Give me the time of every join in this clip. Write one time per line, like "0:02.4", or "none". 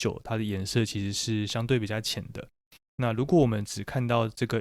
none